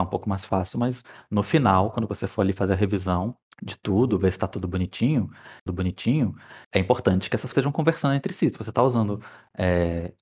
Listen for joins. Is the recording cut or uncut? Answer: cut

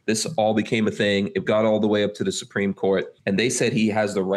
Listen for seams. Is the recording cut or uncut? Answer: cut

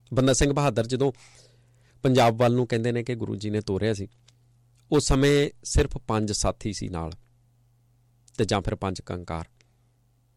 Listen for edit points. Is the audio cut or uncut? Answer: uncut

